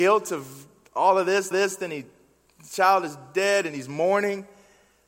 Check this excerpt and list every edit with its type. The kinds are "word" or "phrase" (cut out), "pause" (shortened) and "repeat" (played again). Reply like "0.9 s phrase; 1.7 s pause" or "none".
1.5 s repeat

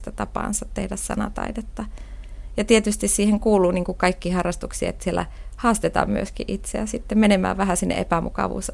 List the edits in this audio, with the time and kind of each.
none

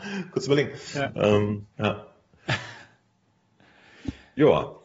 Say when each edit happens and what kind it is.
1.7 s pause

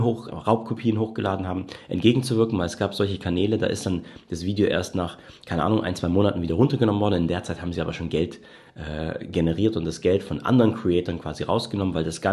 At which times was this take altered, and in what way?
none

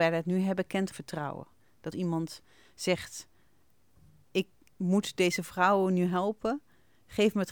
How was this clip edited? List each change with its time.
0.9 s word; 1.9 s word

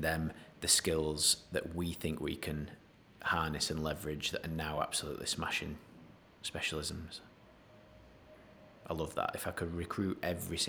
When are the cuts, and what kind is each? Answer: none

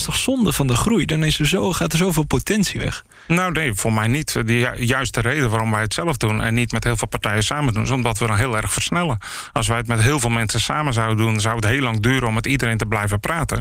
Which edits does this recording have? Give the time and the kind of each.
none

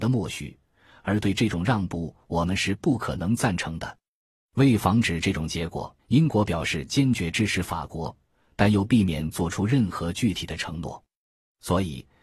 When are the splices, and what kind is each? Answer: 6.0 s pause

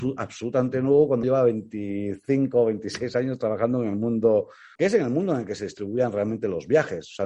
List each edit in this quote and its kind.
1.2 s word; 4.8 s word

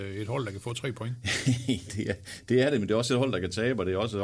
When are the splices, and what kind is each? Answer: 1.9 s word

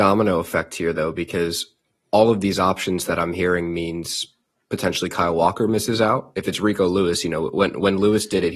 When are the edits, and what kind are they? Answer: none

